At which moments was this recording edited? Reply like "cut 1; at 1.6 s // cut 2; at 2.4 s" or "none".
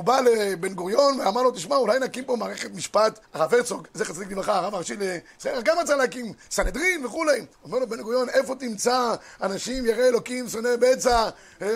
cut 1; at 3.2 s // cut 2; at 7.5 s